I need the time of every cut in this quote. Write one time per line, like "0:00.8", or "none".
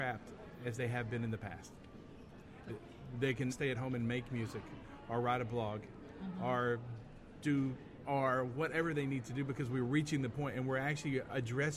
0:02.7
0:03.5
0:08.0